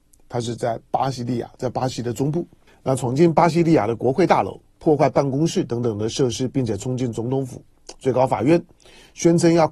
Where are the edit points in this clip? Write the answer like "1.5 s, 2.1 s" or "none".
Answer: 2.7 s